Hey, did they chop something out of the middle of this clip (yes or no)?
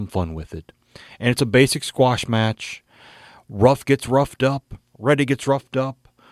no